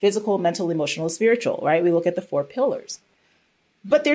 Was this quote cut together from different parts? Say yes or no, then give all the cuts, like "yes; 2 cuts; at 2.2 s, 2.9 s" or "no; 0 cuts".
no; 0 cuts